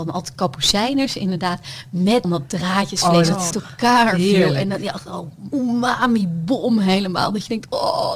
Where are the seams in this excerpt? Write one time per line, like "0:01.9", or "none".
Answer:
0:02.2
0:03.5
0:05.5